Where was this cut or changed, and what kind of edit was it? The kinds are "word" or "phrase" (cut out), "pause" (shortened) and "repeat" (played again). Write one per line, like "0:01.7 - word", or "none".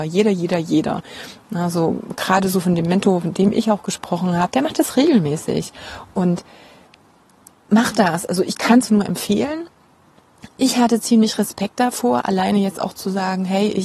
0:08.9 - word